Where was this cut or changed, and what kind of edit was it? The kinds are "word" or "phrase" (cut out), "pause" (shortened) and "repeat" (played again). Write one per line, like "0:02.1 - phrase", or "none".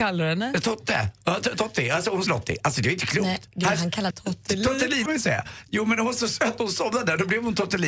0:02.3 - word
0:04.1 - word
0:05.1 - word